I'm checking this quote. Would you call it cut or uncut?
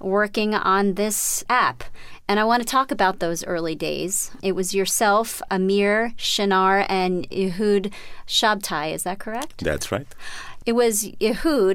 uncut